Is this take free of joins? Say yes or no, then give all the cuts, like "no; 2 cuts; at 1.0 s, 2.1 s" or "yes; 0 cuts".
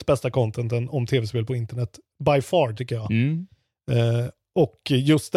yes; 0 cuts